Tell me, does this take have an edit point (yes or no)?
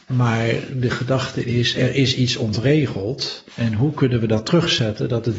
yes